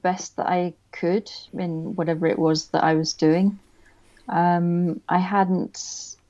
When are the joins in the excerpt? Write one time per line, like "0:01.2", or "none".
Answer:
0:01.5

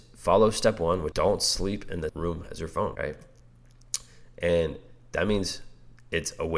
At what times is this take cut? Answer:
0:01.1
0:02.1
0:02.9

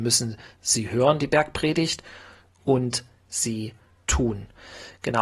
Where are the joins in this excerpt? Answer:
none

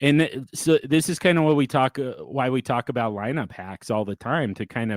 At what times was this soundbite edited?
none

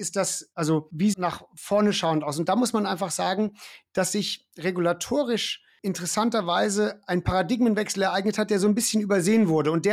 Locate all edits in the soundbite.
0:01.1

